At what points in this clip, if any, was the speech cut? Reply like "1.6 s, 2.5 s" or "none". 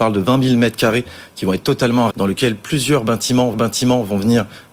2.1 s, 3.5 s